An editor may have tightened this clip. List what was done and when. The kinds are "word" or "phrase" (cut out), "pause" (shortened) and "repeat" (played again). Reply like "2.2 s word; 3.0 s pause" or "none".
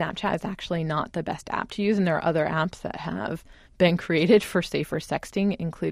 none